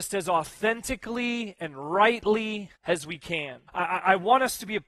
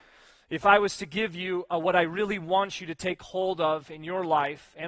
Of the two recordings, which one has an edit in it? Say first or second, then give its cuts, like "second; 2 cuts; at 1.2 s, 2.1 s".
first; 2 cuts; at 2.8 s, 3.7 s